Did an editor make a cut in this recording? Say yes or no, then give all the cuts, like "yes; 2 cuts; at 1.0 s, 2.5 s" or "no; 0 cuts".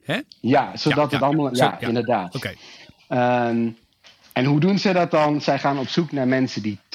no; 0 cuts